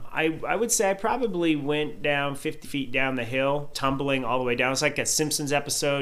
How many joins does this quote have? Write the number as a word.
two